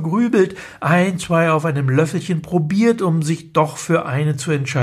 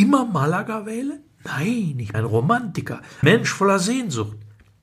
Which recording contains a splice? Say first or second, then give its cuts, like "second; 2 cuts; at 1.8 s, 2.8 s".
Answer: second; 2 cuts; at 2.1 s, 3.2 s